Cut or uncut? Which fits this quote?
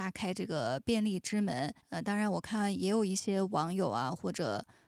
cut